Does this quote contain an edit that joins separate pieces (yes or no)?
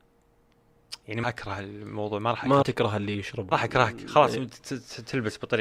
yes